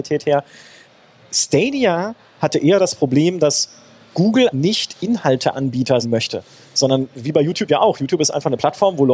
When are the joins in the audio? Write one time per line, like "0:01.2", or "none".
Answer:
0:04.5
0:06.0